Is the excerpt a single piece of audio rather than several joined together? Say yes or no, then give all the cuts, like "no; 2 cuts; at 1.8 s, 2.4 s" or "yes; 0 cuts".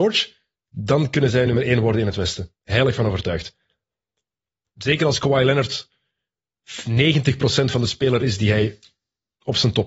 yes; 0 cuts